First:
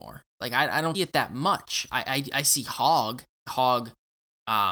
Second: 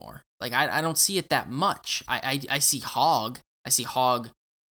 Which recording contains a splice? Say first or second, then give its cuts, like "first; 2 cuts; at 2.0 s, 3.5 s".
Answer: first; 2 cuts; at 0.9 s, 3.5 s